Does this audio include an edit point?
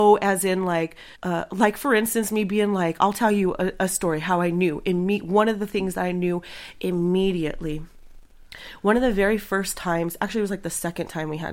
yes; 1 cut; at 1.2 s

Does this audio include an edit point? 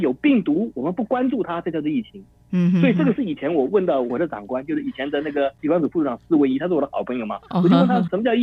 no; 0 cuts

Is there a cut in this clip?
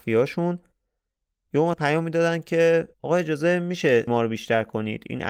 yes; 3 cuts; at 1.7 s, 2.9 s, 4.1 s

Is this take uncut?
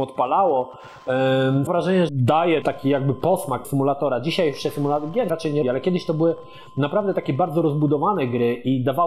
no; 6 cuts; at 1.7 s, 2.1 s, 2.6 s, 3.6 s, 5.3 s, 5.6 s

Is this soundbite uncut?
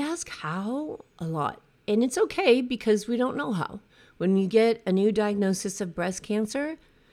no; 2 cuts; at 1.1 s, 3.9 s

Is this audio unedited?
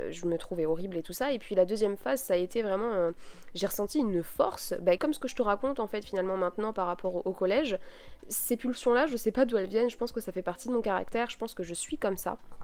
no; 1 cut; at 5.0 s

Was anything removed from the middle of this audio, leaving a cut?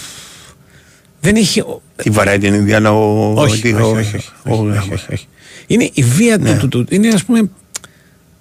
yes; 2 cuts; at 1.9 s, 6.7 s

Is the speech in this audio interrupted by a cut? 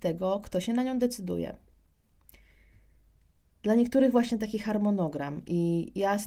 no; 0 cuts

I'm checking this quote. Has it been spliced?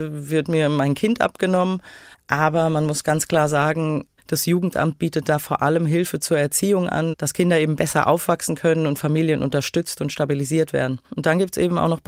no; 0 cuts

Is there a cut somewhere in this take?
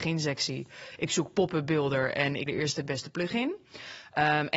yes; 1 cut; at 2.5 s

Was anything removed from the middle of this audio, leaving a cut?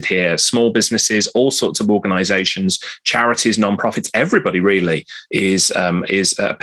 no; 0 cuts

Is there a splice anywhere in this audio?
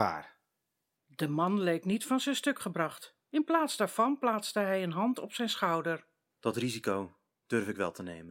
no; 0 cuts

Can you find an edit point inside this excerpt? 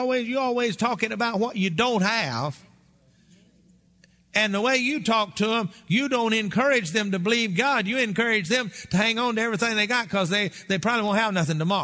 no; 0 cuts

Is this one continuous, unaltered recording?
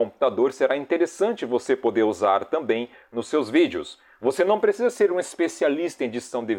yes; 0 cuts

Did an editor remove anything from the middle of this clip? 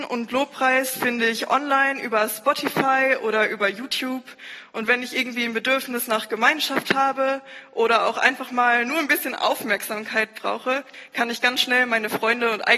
no; 0 cuts

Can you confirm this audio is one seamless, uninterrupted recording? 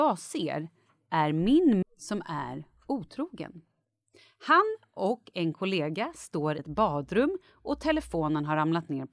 no; 2 cuts; at 1.8 s, 6.6 s

